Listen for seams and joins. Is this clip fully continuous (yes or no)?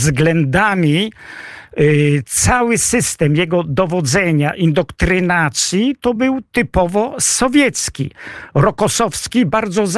yes